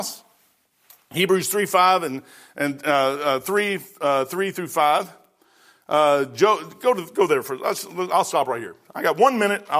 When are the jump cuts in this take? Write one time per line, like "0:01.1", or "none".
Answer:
none